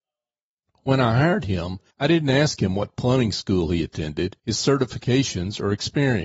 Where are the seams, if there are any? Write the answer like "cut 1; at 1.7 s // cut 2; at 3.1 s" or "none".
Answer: cut 1; at 1.9 s // cut 2; at 4.4 s